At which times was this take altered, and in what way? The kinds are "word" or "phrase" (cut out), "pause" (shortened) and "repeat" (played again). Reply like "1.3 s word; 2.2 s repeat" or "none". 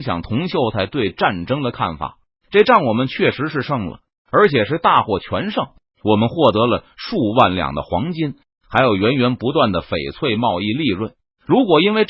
none